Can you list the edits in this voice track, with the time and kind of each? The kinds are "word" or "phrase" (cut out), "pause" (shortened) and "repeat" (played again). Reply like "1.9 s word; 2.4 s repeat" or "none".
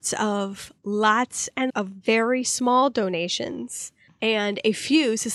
1.7 s word